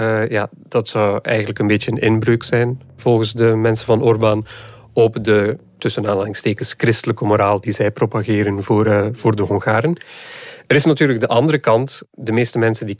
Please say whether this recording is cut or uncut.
uncut